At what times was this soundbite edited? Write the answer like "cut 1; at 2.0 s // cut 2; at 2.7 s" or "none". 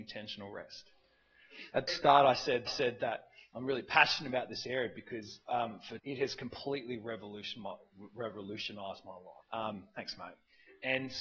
cut 1; at 1.9 s // cut 2; at 2.7 s // cut 3; at 5.4 s // cut 4; at 6.0 s // cut 5; at 9.4 s